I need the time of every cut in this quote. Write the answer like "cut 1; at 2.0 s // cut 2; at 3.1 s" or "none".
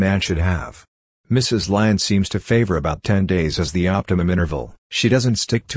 cut 1; at 4.8 s